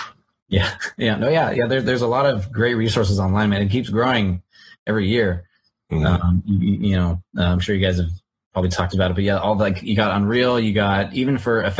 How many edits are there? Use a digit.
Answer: 0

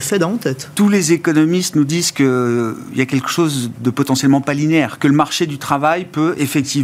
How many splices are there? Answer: 0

